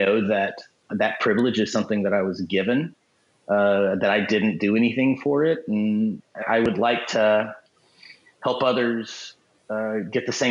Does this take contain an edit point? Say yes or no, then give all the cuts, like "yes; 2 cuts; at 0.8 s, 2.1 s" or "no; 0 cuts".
yes; 1 cut; at 6.4 s